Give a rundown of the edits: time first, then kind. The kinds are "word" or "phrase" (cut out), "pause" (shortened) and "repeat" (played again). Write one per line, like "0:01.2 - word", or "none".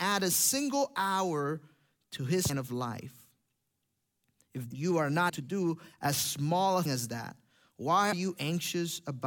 0:02.5 - word
0:04.7 - word
0:05.3 - word
0:06.9 - word
0:08.1 - word